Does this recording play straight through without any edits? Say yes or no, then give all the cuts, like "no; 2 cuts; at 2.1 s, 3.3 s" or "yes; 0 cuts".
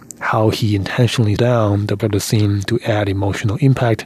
no; 2 cuts; at 1.4 s, 2.0 s